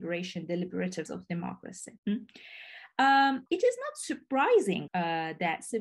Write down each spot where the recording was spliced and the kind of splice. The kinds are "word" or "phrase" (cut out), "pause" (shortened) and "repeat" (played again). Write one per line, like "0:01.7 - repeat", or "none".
0:01.1 - word
0:02.0 - pause
0:03.5 - word
0:04.9 - phrase